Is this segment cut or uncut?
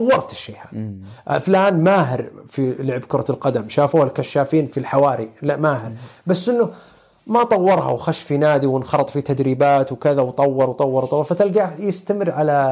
uncut